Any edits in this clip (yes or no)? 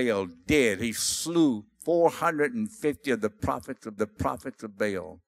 yes